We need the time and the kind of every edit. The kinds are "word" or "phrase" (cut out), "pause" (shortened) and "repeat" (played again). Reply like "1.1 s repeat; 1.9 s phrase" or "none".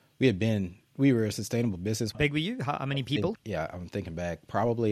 2.1 s phrase; 3.3 s word